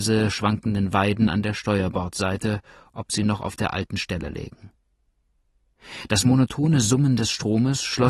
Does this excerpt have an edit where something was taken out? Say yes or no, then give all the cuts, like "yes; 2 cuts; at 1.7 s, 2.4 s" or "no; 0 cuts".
no; 0 cuts